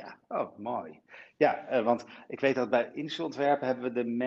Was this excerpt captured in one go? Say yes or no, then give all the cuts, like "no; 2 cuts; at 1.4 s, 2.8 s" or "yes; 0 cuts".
yes; 0 cuts